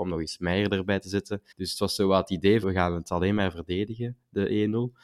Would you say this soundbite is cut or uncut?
cut